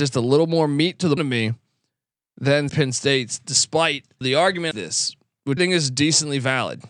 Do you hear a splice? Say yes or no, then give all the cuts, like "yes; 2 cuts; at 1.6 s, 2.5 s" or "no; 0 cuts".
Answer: yes; 5 cuts; at 1.2 s, 2.7 s, 4.2 s, 4.7 s, 5.6 s